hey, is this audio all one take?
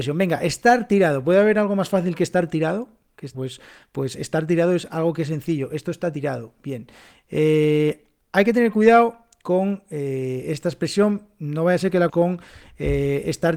no; 2 cuts; at 3.3 s, 12.1 s

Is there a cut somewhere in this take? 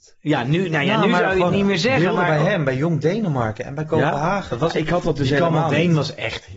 no; 0 cuts

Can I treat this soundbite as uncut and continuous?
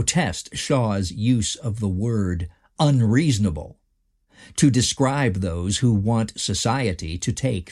yes; 0 cuts

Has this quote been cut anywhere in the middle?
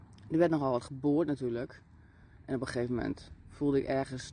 no; 0 cuts

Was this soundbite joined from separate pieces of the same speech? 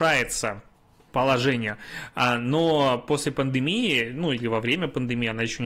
yes; 1 cut; at 1.1 s

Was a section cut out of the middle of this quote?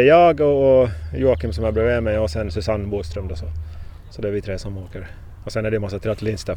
no; 0 cuts

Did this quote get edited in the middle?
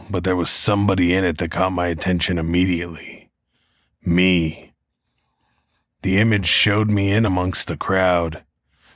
no; 0 cuts

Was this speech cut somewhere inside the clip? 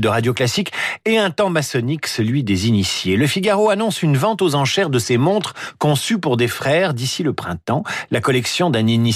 no; 0 cuts

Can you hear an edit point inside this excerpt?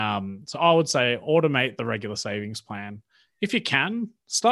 no; 0 cuts

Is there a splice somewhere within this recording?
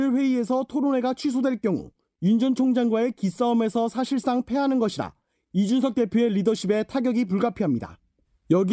no; 0 cuts

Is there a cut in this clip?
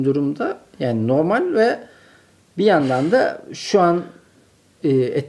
no; 0 cuts

